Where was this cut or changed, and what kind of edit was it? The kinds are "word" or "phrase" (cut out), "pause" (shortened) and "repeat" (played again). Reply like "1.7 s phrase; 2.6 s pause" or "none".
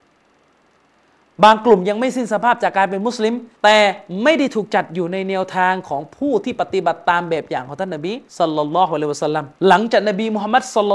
3.5 s pause; 8.3 s pause; 9.6 s pause